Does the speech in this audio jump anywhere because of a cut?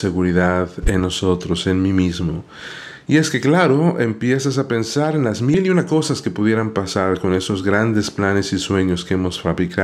no; 0 cuts

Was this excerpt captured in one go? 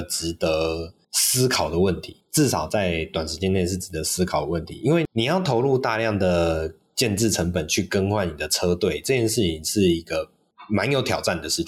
no; 2 cuts; at 1.0 s, 2.2 s

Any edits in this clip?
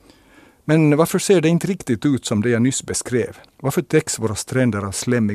yes; 1 cut; at 3.5 s

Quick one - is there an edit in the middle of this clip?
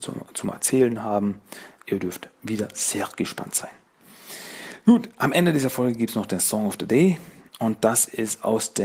no; 0 cuts

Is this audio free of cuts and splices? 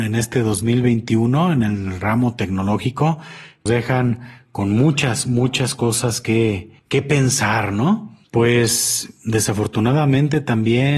no; 3 cuts; at 3.7 s, 6.8 s, 8.2 s

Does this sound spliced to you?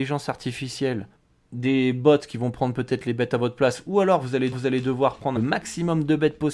yes; 3 cuts; at 1.2 s, 4.5 s, 5.4 s

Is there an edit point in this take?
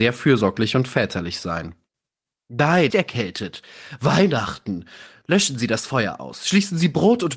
yes; 1 cut; at 2.9 s

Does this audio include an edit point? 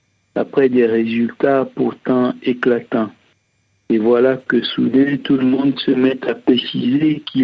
no; 0 cuts

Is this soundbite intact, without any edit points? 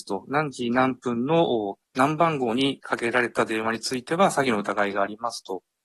no; 1 cut; at 1.9 s

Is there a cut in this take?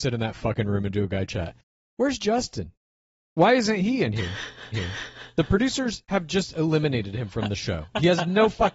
yes; 2 cuts; at 3.1 s, 4.7 s

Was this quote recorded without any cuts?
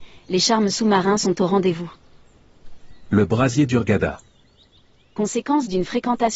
yes; 0 cuts

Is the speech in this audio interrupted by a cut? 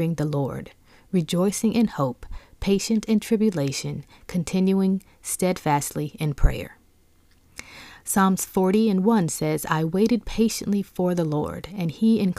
no; 0 cuts

